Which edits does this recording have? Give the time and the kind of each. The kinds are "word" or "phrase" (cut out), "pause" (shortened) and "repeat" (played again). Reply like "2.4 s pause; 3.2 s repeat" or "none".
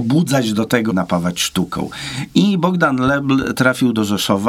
0.9 s phrase